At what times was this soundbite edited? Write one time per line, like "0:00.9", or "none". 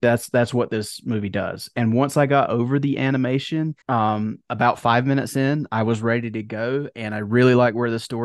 0:03.8